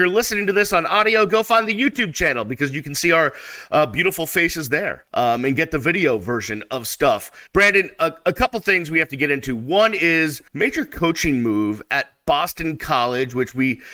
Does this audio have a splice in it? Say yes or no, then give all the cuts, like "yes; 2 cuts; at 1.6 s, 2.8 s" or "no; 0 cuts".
yes; 3 cuts; at 5.1 s, 7.5 s, 10.5 s